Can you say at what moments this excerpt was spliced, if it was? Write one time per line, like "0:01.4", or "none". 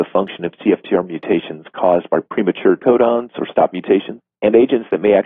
0:02.8